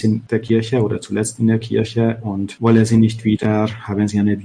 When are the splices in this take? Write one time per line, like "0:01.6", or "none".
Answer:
none